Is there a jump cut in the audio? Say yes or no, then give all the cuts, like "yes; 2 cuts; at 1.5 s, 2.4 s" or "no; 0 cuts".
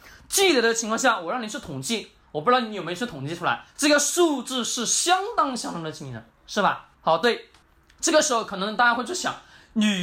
yes; 4 cuts; at 3.7 s, 6.3 s, 6.9 s, 7.6 s